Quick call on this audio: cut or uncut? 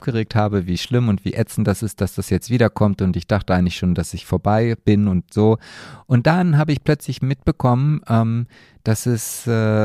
uncut